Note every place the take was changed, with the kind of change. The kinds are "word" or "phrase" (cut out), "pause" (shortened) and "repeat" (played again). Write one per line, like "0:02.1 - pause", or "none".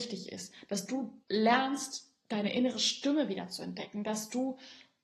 0:01.2 - pause